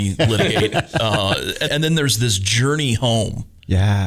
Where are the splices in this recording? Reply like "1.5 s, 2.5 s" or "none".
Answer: 1.7 s